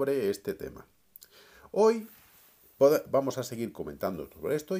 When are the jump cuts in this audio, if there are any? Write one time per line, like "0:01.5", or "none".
none